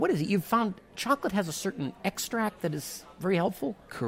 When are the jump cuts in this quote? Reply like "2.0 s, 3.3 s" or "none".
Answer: none